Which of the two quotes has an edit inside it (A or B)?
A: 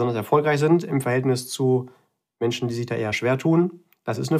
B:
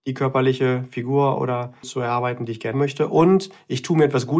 B